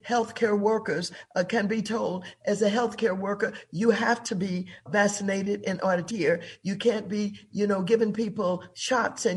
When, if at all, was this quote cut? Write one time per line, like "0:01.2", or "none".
0:04.9
0:06.1